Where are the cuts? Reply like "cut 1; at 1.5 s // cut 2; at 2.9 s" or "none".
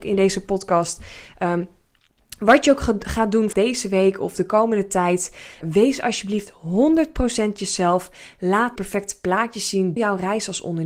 cut 1; at 3.5 s // cut 2; at 5.6 s // cut 3; at 8.8 s // cut 4; at 10.0 s